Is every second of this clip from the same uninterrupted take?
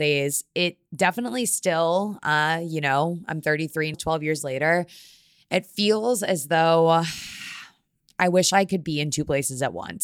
no; 1 cut; at 3.9 s

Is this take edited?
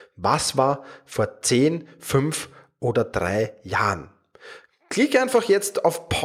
no; 0 cuts

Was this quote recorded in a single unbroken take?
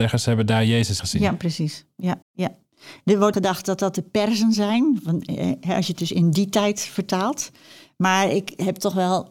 no; 3 cuts; at 1.0 s, 2.2 s, 3.3 s

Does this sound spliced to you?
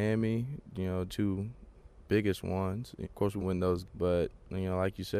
yes; 4 cuts; at 1.1 s, 3.0 s, 3.4 s, 3.8 s

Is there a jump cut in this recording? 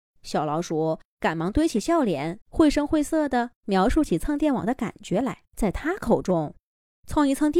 yes; 3 cuts; at 2.4 s, 3.6 s, 5.5 s

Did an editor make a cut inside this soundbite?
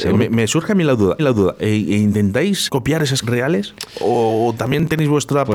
yes; 3 cuts; at 1.2 s, 2.7 s, 3.2 s

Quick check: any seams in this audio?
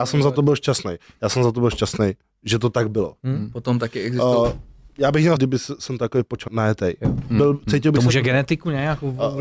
yes; 2 cuts; at 5.4 s, 6.5 s

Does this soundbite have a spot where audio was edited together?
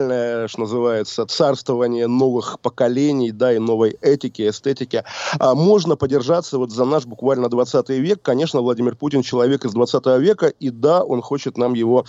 no; 0 cuts

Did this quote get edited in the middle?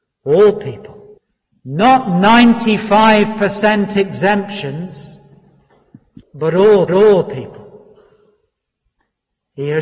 yes; 3 cuts; at 1.2 s, 6.2 s, 6.9 s

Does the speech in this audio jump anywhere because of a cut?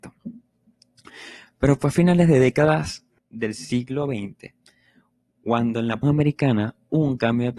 yes; 2 cuts; at 3.2 s, 6.0 s

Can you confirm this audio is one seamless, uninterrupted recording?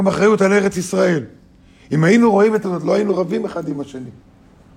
no; 1 cut; at 2.6 s

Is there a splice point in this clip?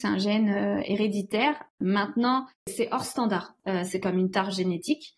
yes; 2 cuts; at 1.7 s, 4.0 s

